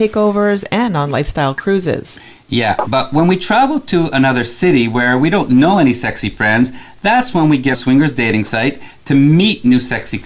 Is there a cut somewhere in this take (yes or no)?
yes